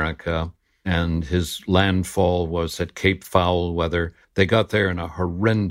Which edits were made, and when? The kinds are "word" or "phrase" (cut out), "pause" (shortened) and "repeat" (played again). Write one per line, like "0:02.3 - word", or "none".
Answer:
0:04.2 - pause

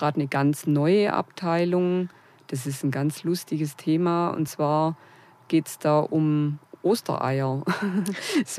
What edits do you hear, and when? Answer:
none

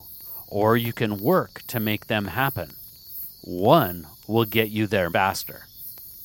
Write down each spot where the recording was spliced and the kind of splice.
0:05.1 - word

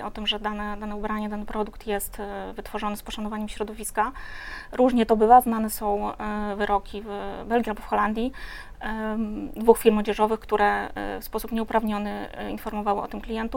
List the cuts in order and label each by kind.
none

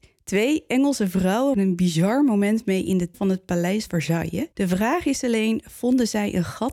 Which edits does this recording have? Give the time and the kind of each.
0:01.5 - word
0:03.1 - word
0:03.9 - word
0:04.5 - pause

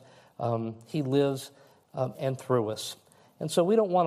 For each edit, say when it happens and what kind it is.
0:02.1 - word

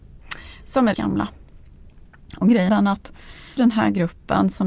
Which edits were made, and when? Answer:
0:00.9 - word
0:02.7 - word
0:03.6 - word

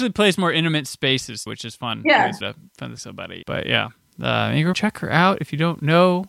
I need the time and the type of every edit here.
0:01.5 - word
0:02.4 - word
0:03.0 - word
0:03.4 - word
0:04.7 - word

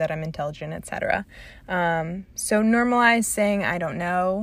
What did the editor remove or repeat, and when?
none

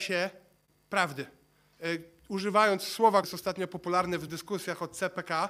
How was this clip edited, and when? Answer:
0:03.2 - word
0:04.3 - word

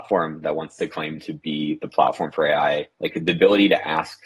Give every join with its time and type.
0:02.9 - pause

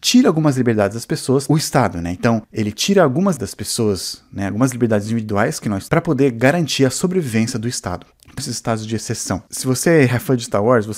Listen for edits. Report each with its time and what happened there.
0:01.5 - phrase
0:02.4 - pause
0:03.4 - word
0:05.9 - word
0:08.4 - phrase

